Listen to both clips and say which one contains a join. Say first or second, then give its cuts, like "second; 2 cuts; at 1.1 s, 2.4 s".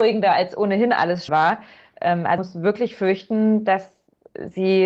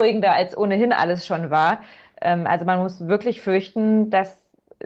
first; 2 cuts; at 1.3 s, 2.4 s